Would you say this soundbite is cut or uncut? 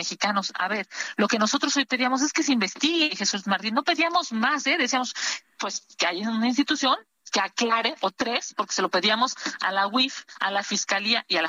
uncut